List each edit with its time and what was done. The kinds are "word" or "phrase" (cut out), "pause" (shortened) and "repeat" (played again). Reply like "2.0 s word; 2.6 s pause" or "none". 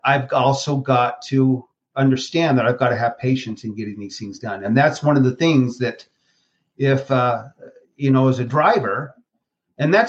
none